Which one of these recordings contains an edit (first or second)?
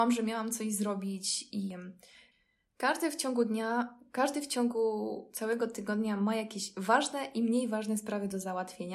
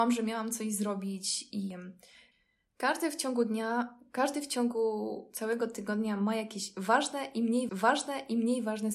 second